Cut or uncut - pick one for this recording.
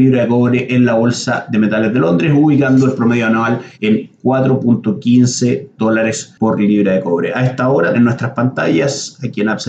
cut